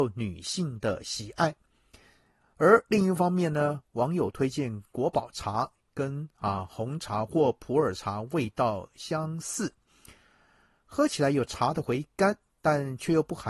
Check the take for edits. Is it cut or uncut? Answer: uncut